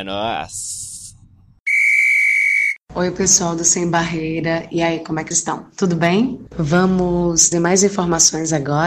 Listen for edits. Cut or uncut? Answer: cut